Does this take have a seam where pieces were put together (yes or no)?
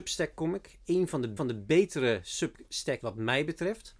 yes